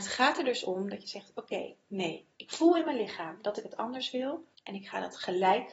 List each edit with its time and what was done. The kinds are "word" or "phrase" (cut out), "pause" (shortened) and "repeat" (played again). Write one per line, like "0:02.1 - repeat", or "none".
0:02.3 - pause
0:04.5 - pause

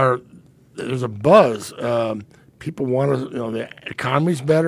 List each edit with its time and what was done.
none

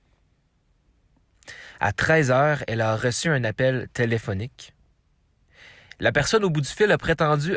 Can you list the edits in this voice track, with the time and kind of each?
none

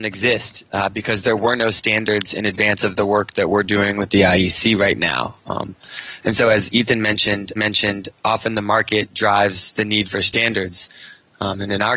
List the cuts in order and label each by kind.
0:07.6 - repeat

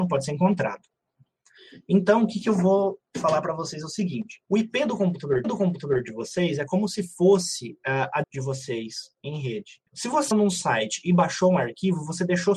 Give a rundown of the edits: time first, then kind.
0:04.4 - pause
0:05.4 - repeat
0:08.2 - word
0:09.9 - pause
0:10.3 - word

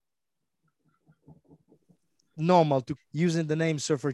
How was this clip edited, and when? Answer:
0:03.0 - word

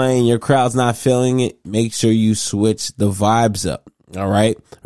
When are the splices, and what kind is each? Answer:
none

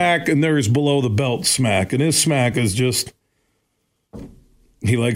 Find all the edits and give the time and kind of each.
none

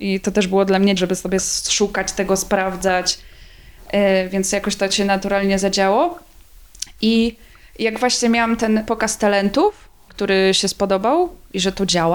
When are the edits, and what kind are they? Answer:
0:01.0 - word

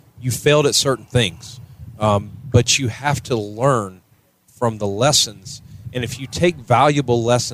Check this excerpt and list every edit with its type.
none

